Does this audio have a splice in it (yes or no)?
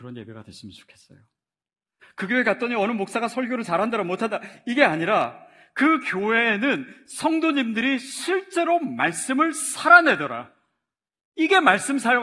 no